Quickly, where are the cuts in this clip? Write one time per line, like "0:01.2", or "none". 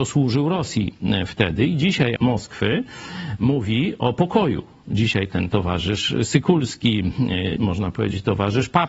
0:02.2
0:07.6